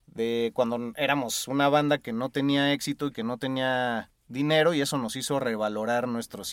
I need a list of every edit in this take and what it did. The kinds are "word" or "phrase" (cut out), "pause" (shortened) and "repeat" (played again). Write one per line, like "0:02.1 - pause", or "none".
none